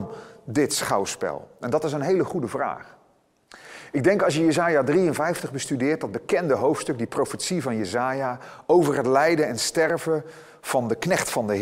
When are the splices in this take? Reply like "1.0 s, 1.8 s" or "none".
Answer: none